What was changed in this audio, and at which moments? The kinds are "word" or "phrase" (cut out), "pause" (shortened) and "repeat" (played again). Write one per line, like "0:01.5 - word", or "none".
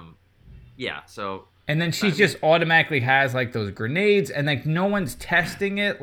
none

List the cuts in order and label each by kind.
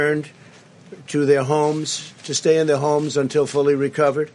none

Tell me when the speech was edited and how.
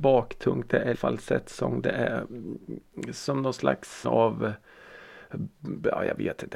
0:00.9 - word
0:04.0 - word

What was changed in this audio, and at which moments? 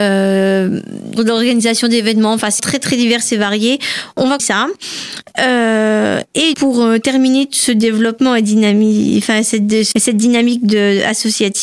0:01.2 - word
0:02.6 - word
0:04.4 - word
0:06.5 - word
0:09.9 - word

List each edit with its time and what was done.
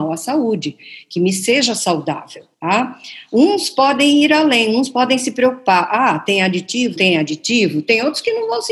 0:02.5 - pause
0:07.0 - word

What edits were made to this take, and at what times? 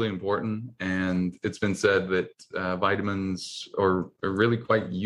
none

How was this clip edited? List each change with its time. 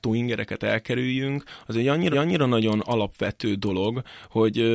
0:02.1 - repeat

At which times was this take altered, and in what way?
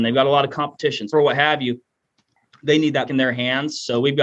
0:01.1 - word
0:03.1 - word

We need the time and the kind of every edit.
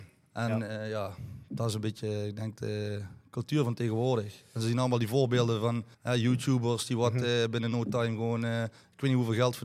0:05.9 - pause

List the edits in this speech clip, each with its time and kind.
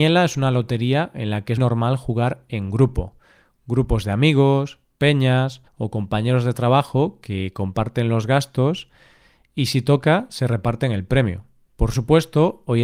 0:01.6 - word
0:05.7 - pause
0:11.7 - pause

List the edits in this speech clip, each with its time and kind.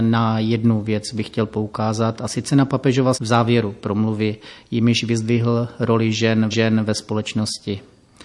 0:03.1 - word
0:06.5 - repeat

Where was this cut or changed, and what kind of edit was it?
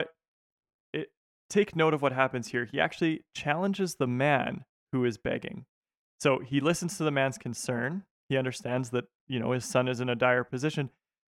0:01.3 - pause
0:05.8 - pause

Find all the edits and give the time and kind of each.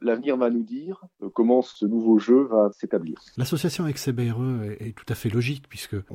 none

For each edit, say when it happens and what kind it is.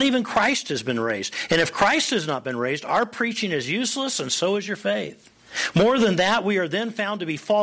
none

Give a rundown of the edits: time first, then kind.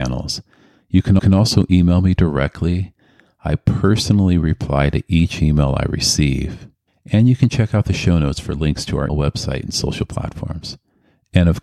0:01.2 - repeat
0:09.1 - word

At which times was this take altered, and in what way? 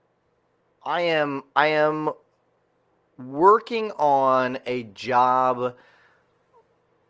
none

